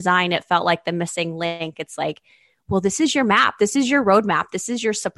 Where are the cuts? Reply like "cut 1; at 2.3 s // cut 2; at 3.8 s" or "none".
none

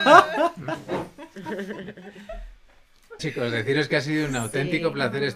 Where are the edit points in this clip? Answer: cut 1; at 3.2 s

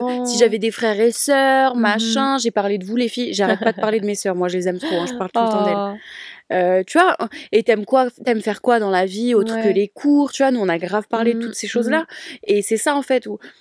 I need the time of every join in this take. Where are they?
none

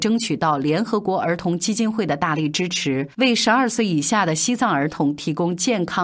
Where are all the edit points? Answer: cut 1; at 3.1 s

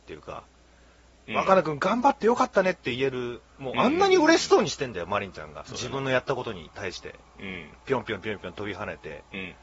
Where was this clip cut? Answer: cut 1; at 3.5 s // cut 2; at 5.6 s

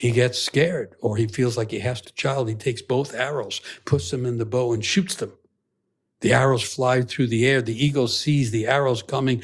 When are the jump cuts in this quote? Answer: cut 1; at 2.0 s

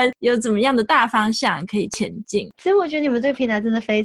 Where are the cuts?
none

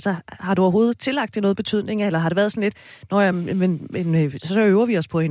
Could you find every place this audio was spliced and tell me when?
none

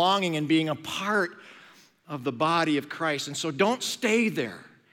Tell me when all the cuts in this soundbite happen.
none

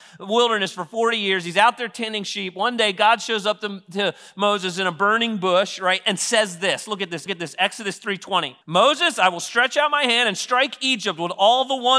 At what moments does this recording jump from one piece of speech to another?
cut 1; at 7.3 s // cut 2; at 8.6 s

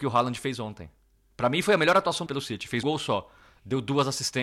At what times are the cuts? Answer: cut 1; at 2.3 s // cut 2; at 2.8 s

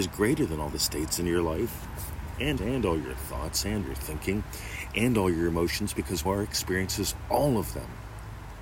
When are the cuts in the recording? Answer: cut 1; at 2.6 s // cut 2; at 3.8 s // cut 3; at 6.3 s

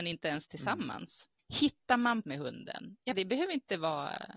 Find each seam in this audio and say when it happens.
cut 1; at 2.2 s // cut 2; at 3.1 s

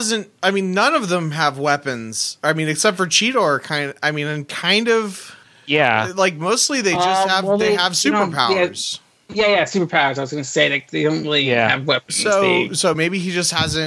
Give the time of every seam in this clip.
none

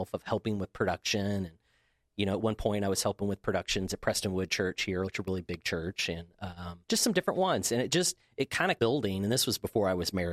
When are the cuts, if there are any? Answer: cut 1; at 5.1 s // cut 2; at 6.8 s // cut 3; at 8.8 s

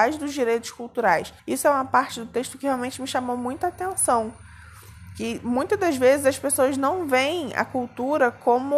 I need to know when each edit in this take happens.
cut 1; at 1.4 s

